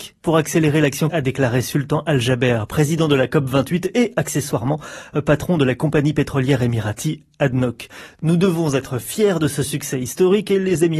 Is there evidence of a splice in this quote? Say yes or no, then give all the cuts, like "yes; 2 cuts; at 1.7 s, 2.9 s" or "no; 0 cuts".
yes; 1 cut; at 1.1 s